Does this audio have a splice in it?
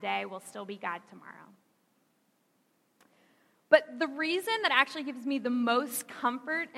no; 0 cuts

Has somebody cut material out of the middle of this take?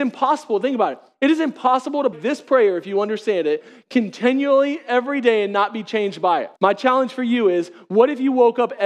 yes; 2 cuts; at 2.1 s, 6.6 s

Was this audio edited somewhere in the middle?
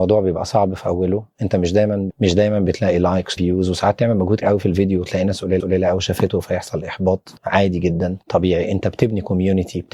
yes; 6 cuts; at 2.1 s, 3.4 s, 4.4 s, 5.6 s, 7.4 s, 8.2 s

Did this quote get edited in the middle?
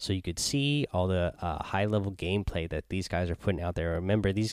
no; 0 cuts

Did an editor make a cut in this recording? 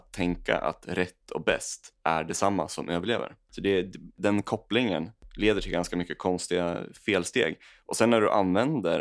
no; 0 cuts

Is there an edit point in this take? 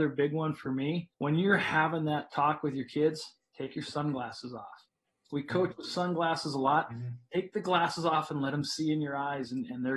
yes; 1 cut; at 1.1 s

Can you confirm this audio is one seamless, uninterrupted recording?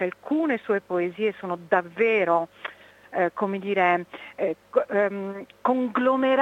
yes; 0 cuts

